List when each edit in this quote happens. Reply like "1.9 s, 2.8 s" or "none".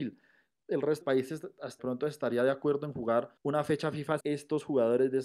1.0 s, 1.8 s, 3.4 s, 4.2 s